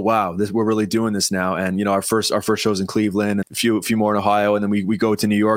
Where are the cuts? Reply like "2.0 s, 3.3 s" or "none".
3.4 s